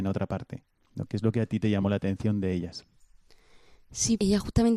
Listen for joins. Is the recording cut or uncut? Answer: uncut